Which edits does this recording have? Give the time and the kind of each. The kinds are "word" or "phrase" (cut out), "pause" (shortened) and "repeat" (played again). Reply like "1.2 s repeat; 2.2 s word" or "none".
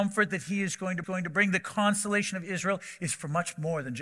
1.0 s repeat

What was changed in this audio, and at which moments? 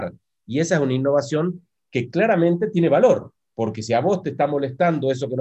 none

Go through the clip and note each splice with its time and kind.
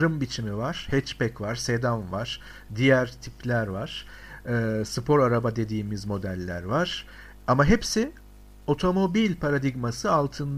none

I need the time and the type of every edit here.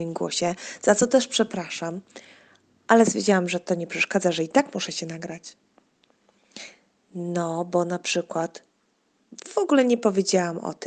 none

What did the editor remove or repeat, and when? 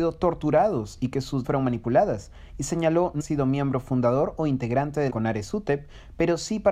1.4 s word; 3.2 s word; 5.1 s phrase

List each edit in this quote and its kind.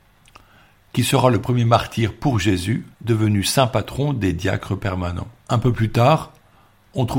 2.9 s pause; 5.4 s pause

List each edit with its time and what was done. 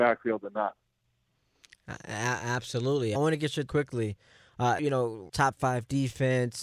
3.1 s word; 3.7 s word; 4.8 s word; 5.3 s word

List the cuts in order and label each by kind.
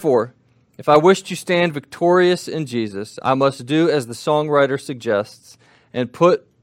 none

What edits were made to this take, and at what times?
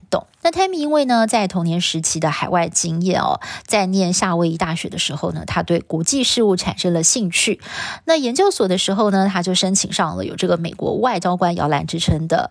none

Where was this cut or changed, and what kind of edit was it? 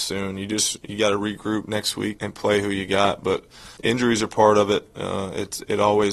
2.2 s word; 3.8 s word

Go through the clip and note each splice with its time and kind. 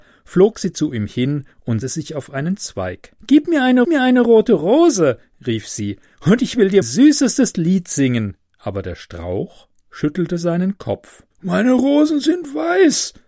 1.8 s word; 3.2 s pause; 3.8 s repeat; 6.8 s word; 8.5 s pause; 11.3 s pause

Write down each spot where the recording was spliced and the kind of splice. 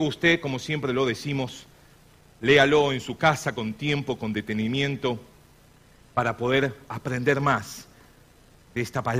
none

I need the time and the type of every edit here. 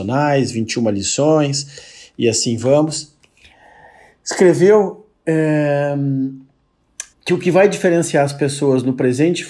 7.1 s pause

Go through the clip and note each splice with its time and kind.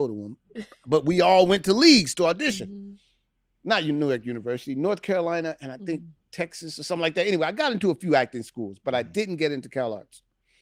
none

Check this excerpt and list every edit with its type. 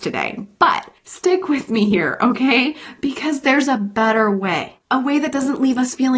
1.0 s pause; 4.8 s pause

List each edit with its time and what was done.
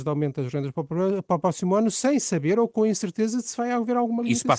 none

